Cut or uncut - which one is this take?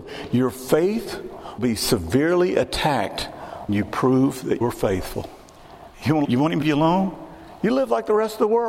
cut